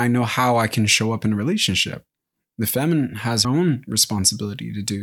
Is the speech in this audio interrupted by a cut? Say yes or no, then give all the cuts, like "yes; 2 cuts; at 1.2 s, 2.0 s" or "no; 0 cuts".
yes; 1 cut; at 3.4 s